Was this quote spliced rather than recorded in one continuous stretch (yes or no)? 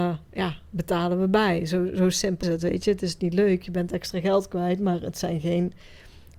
yes